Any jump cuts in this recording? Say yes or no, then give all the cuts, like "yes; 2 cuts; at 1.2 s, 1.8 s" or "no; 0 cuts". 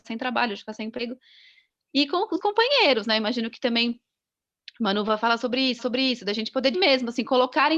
yes; 3 cuts; at 2.4 s, 5.8 s, 6.7 s